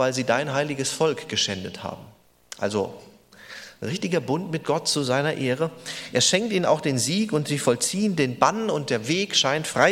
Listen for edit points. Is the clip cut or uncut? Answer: cut